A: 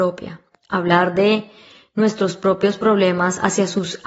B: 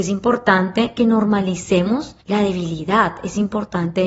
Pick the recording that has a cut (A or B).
B